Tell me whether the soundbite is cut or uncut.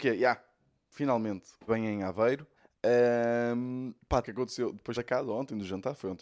cut